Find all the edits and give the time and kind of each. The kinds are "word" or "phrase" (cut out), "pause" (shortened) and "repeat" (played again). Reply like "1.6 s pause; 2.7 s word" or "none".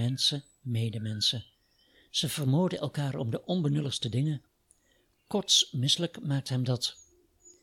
none